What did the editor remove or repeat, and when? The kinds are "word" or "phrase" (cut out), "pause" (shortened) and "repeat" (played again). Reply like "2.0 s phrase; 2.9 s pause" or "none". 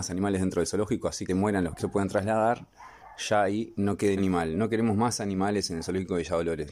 1.3 s phrase; 1.8 s word; 4.2 s word

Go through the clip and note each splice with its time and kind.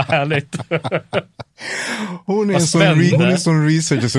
3.1 s word

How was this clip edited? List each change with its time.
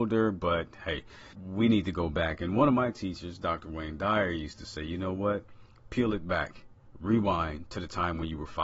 1.3 s pause

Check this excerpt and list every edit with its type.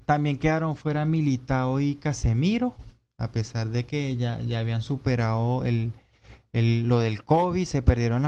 none

